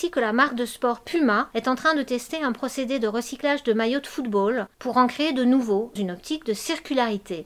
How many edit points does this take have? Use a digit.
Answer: 3